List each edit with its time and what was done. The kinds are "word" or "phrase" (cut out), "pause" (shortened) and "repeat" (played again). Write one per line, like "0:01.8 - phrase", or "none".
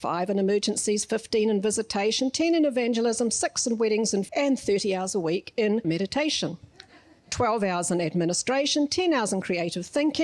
0:04.3 - word
0:05.8 - word

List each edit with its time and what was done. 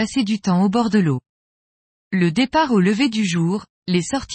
none

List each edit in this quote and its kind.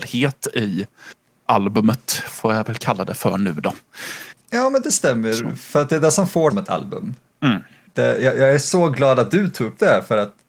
0:01.3 - word
0:04.4 - pause
0:06.5 - phrase
0:07.3 - pause

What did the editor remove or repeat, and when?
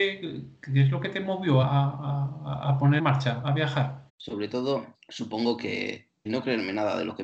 0:01.6 - word
0:03.0 - word
0:03.4 - word
0:04.1 - pause
0:04.9 - pause
0:06.3 - word

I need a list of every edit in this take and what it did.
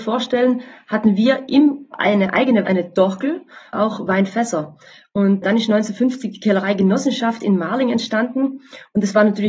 0:01.9 - word
0:02.6 - word
0:03.7 - word
0:05.4 - word

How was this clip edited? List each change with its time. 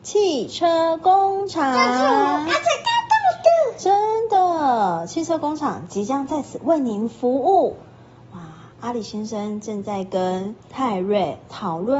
0:08.7 - pause
0:10.6 - pause

